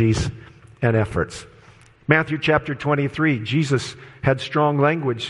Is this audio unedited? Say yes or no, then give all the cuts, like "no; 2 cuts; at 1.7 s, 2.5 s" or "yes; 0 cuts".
yes; 0 cuts